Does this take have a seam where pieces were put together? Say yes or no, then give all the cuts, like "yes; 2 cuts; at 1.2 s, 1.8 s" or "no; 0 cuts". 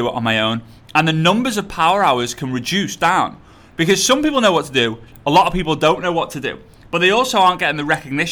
no; 0 cuts